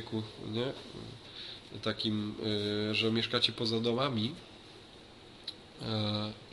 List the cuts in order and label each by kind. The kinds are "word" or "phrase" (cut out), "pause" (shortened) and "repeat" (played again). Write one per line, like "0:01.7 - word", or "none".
none